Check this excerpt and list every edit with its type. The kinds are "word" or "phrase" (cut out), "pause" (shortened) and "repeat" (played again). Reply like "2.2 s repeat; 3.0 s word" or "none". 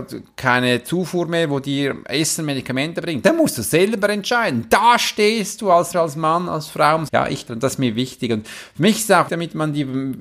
5.9 s word; 7.1 s word; 7.5 s phrase; 9.3 s word